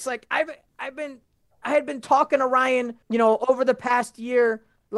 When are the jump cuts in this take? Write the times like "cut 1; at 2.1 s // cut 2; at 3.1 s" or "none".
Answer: cut 1; at 3.0 s